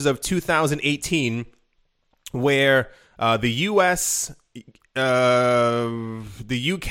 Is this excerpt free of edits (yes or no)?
yes